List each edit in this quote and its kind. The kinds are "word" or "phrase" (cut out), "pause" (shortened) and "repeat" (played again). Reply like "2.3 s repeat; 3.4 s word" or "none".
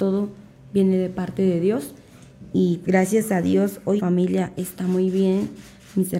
2.8 s word; 4.0 s word